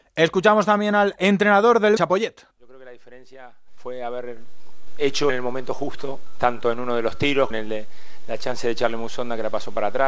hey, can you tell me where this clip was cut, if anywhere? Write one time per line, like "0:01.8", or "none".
0:02.0
0:02.5
0:05.3
0:07.5